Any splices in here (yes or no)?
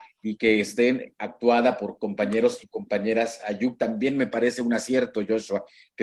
no